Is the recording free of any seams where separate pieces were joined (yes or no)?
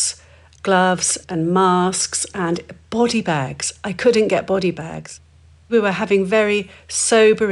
no